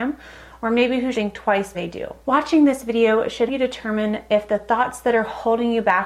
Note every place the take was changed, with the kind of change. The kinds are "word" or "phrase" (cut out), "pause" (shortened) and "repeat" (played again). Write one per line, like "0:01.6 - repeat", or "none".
0:01.1 - word
0:01.7 - word
0:02.2 - pause
0:03.5 - word